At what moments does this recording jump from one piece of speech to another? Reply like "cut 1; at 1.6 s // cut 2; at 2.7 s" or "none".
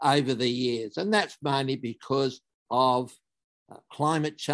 none